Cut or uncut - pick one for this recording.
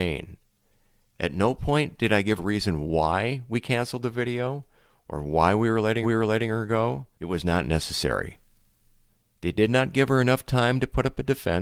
cut